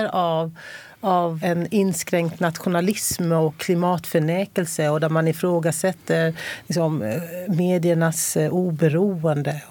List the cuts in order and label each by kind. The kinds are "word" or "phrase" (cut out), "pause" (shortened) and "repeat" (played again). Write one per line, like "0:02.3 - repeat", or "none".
0:01.4 - word

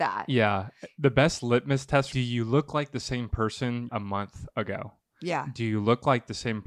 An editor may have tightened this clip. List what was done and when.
0:02.1 - phrase
0:03.9 - phrase

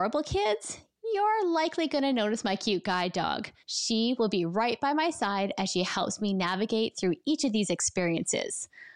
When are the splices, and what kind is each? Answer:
0:03.6 - pause

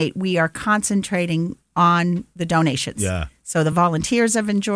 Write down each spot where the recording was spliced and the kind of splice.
none

